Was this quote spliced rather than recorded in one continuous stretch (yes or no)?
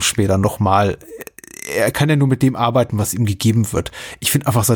no